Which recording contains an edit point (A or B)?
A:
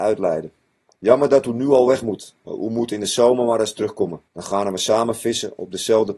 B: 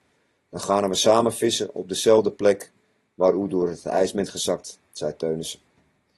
A